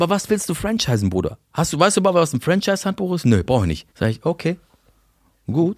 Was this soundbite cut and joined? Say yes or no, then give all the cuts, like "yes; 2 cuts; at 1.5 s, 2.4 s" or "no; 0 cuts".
yes; 1 cut; at 3.9 s